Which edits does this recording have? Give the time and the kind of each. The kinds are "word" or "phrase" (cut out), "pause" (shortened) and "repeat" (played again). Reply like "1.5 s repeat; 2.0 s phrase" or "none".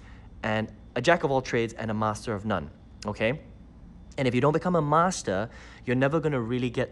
none